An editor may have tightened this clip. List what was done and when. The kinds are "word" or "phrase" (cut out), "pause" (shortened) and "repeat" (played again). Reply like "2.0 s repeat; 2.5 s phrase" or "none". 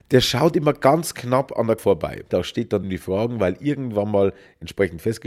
1.8 s word; 2.8 s phrase